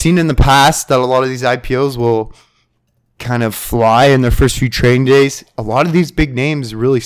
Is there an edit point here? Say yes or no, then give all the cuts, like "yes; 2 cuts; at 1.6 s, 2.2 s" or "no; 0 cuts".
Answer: no; 0 cuts